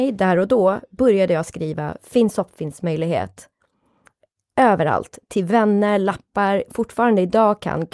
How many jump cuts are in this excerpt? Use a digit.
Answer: 0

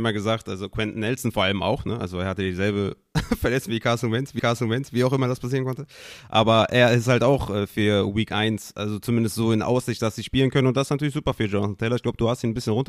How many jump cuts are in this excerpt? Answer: 1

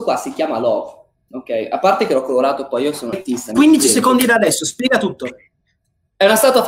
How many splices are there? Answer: 1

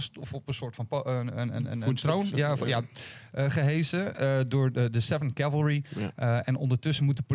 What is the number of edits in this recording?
0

